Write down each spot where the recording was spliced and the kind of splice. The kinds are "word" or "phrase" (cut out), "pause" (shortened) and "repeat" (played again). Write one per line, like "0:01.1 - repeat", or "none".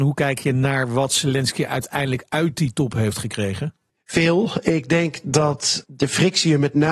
0:05.8 - word